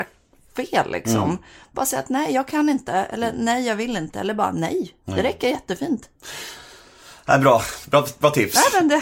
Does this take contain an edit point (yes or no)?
no